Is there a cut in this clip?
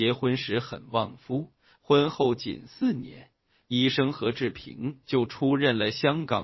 no; 0 cuts

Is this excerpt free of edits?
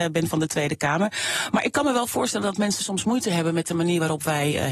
yes; 0 cuts

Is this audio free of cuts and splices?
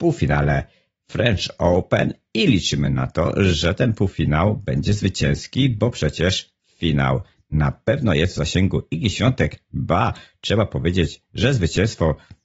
yes; 0 cuts

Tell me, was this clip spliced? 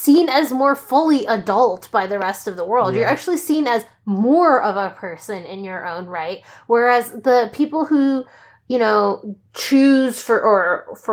yes; 1 cut; at 9.4 s

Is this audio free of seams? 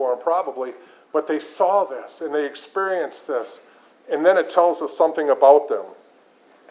yes; 0 cuts

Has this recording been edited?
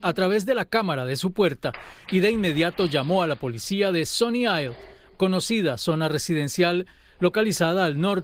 yes; 1 cut; at 5.1 s

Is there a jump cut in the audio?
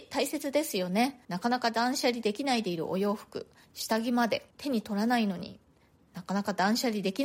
yes; 2 cuts; at 1.2 s, 4.5 s

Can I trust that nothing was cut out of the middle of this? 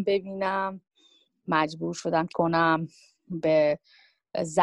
no; 1 cut; at 2.3 s

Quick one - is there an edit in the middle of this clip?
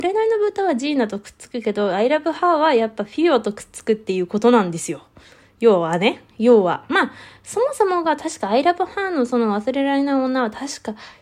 no; 0 cuts

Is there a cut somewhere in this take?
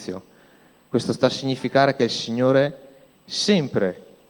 no; 0 cuts

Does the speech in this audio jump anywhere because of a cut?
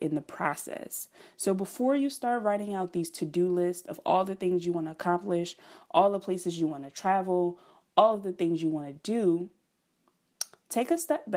no; 0 cuts

